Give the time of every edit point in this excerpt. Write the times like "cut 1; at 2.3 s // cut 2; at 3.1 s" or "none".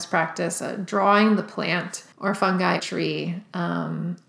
cut 1; at 2.1 s // cut 2; at 2.8 s